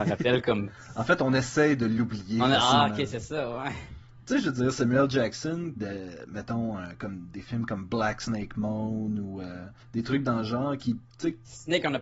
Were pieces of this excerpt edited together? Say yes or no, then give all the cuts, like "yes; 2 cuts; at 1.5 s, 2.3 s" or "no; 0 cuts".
yes; 2 cuts; at 5.8 s, 9.8 s